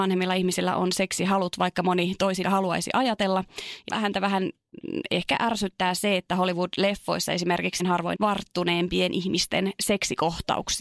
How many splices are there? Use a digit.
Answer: 4